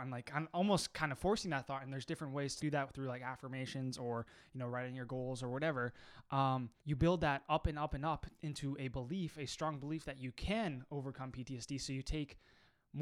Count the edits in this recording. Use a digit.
2